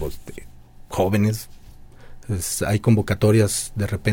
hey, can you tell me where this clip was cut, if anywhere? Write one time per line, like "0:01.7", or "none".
none

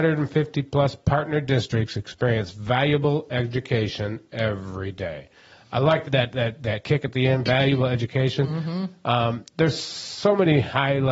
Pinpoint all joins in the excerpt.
0:06.0

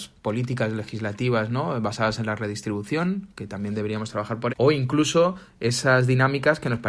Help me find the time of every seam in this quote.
0:04.5

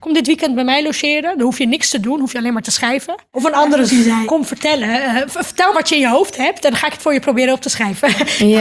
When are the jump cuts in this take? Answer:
0:03.9
0:04.2
0:05.7

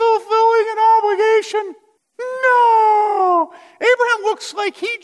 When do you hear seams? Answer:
0:02.0

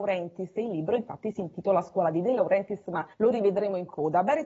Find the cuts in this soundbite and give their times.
0:03.1

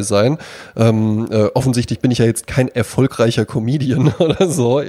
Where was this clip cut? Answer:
none

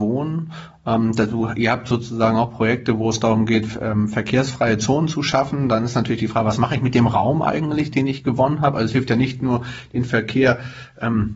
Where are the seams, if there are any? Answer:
none

